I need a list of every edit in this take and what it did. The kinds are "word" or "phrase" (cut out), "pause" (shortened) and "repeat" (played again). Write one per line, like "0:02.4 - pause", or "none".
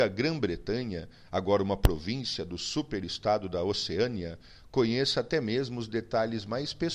none